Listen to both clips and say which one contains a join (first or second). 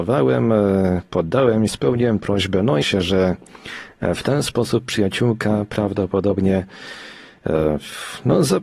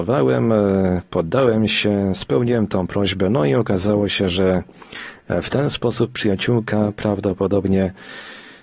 first